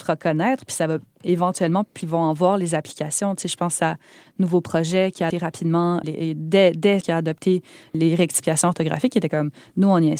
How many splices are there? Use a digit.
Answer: 4